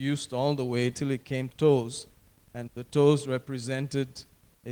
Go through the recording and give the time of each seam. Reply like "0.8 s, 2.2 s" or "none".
1.5 s, 2.7 s